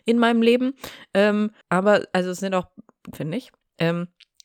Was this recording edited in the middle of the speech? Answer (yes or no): yes